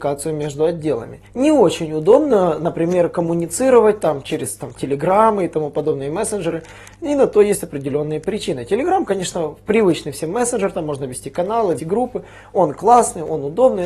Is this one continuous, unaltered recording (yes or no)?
no